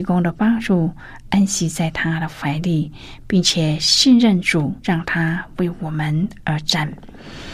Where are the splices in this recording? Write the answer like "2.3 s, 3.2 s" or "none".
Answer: 4.8 s

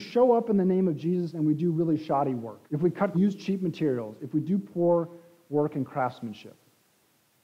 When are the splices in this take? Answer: 2.7 s, 3.1 s

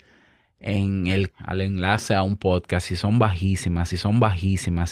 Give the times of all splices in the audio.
1.3 s, 3.9 s

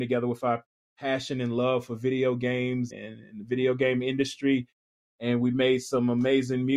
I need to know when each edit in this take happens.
2.9 s

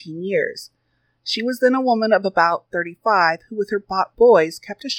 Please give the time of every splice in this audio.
none

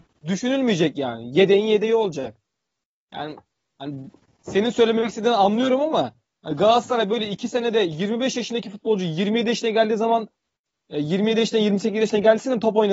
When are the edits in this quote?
none

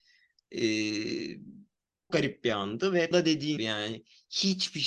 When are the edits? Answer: 2.1 s, 3.1 s, 3.6 s

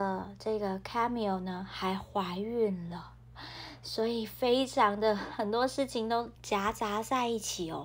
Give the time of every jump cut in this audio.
6.4 s

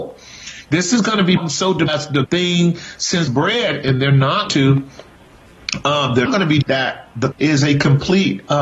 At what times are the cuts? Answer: 1.4 s, 1.9 s, 2.2 s, 3.3 s, 4.5 s, 6.3 s, 6.6 s, 7.3 s

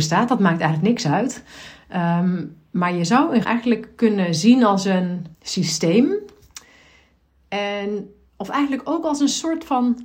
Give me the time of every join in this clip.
3.4 s, 5.3 s

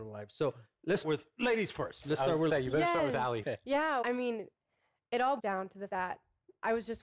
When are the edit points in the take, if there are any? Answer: 1.0 s, 2.0 s, 2.5 s, 3.4 s, 4.0 s, 5.4 s, 5.9 s

